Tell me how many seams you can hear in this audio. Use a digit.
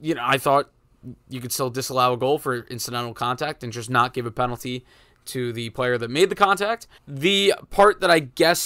1